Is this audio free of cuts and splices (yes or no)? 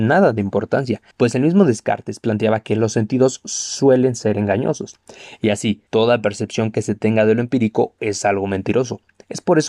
no